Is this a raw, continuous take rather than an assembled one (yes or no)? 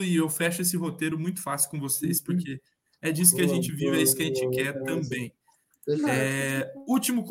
yes